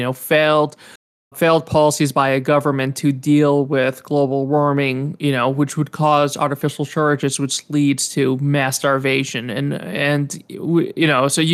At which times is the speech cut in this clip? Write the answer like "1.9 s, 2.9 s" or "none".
1.3 s